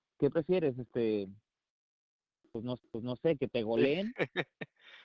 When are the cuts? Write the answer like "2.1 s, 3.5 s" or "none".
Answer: 2.8 s

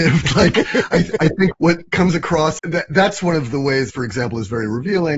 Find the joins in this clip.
1.2 s, 1.5 s, 2.6 s, 3.9 s

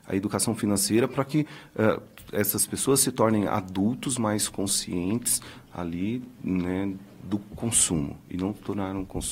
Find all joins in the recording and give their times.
none

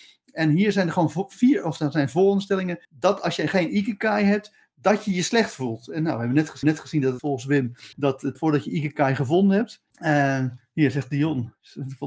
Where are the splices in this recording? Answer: 2.8 s, 6.6 s, 7.2 s, 7.9 s, 8.3 s, 9.9 s

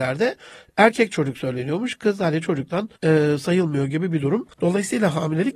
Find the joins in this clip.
3.0 s, 4.5 s

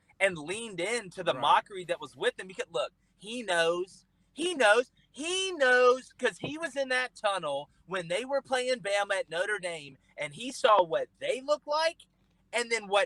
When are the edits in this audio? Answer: none

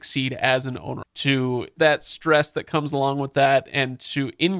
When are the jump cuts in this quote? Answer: 1.0 s, 1.8 s

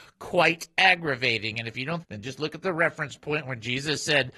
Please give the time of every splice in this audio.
2.0 s

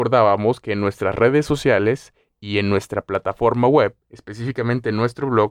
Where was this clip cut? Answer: none

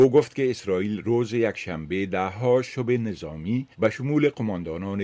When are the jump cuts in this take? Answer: 3.7 s

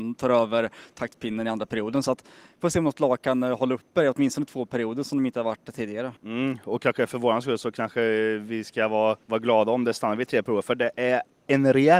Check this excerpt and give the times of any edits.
6.2 s, 9.2 s

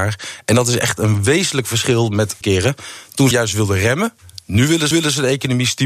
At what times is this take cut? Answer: 2.4 s, 3.3 s, 4.9 s

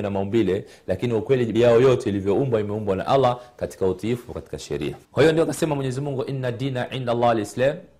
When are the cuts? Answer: 1.5 s, 5.0 s

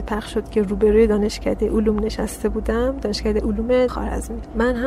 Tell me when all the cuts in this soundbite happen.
3.9 s

